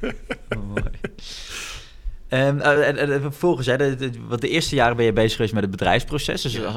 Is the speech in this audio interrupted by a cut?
no; 0 cuts

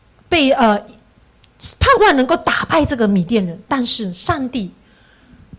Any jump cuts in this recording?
yes; 1 cut; at 3.6 s

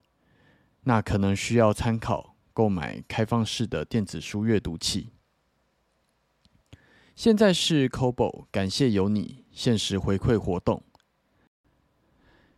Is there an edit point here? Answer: no; 0 cuts

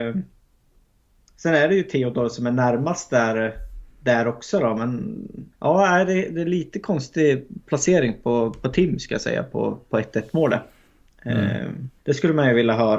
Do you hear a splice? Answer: yes; 3 cuts; at 3.9 s, 5.5 s, 12.0 s

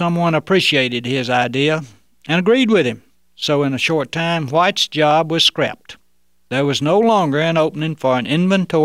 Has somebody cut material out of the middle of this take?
no; 0 cuts

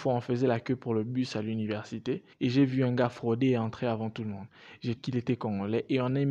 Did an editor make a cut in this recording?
yes; 2 cuts; at 2.3 s, 5.0 s

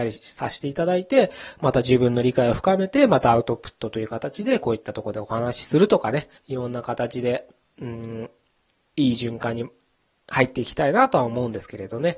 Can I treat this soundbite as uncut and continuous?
no; 1 cut; at 6.4 s

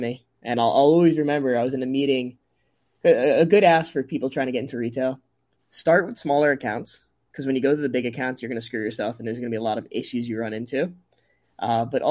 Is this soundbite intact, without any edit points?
yes; 0 cuts

